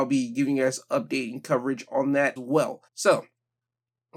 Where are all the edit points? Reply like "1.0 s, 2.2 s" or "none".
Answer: 2.4 s, 2.9 s